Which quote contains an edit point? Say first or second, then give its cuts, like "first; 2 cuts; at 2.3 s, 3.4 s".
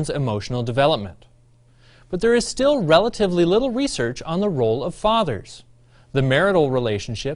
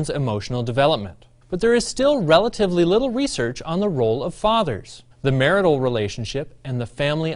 second; 2 cuts; at 1.4 s, 5.1 s